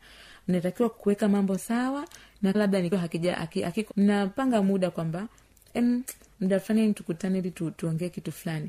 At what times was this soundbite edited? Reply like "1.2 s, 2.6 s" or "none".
2.5 s, 2.9 s, 3.9 s